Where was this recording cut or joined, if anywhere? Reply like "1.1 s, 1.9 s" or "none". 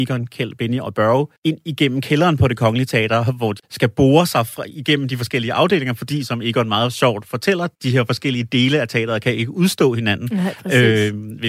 1.4 s, 3.6 s, 7.7 s